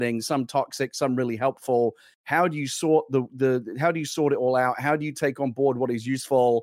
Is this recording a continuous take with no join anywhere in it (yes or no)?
yes